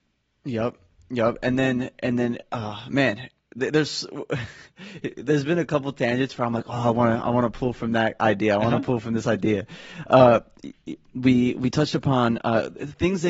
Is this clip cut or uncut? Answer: uncut